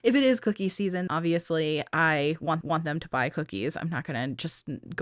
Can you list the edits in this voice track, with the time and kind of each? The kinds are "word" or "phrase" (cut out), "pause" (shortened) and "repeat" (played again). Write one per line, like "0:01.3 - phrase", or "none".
0:01.1 - word
0:02.6 - repeat